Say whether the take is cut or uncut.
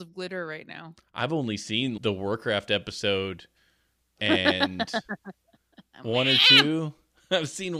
cut